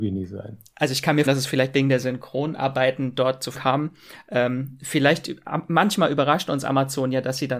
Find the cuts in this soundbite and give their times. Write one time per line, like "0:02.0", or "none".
0:01.3
0:03.5